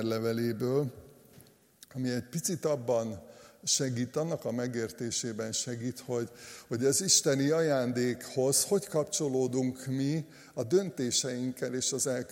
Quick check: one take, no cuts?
yes; 0 cuts

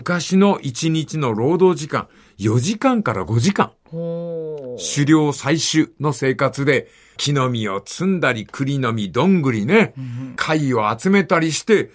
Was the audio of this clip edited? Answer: no; 0 cuts

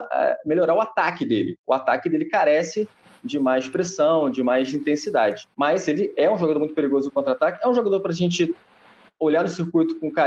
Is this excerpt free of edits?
no; 1 cut; at 5.5 s

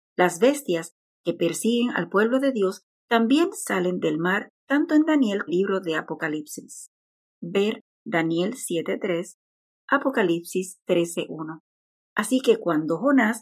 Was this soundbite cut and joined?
yes; 1 cut; at 5.5 s

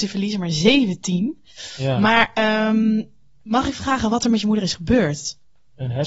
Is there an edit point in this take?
no; 0 cuts

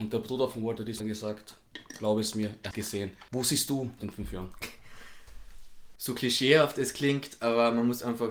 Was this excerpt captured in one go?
no; 4 cuts; at 1.0 s, 2.7 s, 3.3 s, 4.0 s

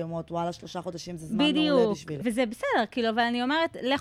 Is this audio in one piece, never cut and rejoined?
no; 1 cut; at 2.2 s

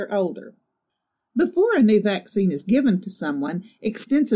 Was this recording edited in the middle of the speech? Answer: no; 0 cuts

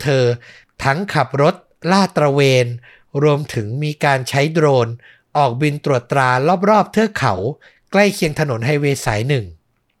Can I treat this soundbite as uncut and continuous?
yes; 0 cuts

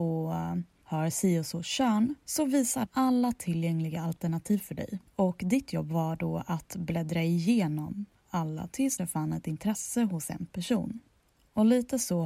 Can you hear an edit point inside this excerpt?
yes; 4 cuts; at 2.2 s, 2.9 s, 5.1 s, 9.0 s

